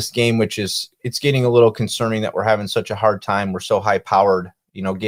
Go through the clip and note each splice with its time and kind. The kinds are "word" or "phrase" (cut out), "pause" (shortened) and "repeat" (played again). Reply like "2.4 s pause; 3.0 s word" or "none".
none